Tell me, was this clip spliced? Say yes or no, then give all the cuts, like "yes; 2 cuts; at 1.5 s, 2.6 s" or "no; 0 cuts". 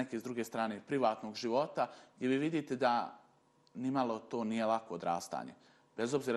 no; 0 cuts